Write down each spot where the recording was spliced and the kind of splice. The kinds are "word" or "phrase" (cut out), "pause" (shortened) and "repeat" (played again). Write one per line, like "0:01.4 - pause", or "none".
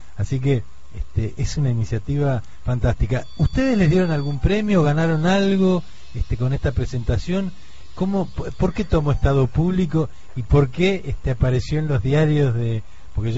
none